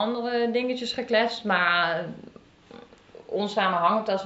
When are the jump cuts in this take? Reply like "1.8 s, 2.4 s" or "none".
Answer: none